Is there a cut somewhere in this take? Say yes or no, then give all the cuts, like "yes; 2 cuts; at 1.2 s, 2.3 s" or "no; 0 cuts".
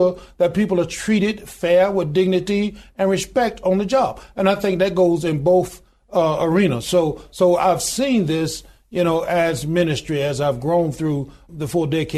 no; 0 cuts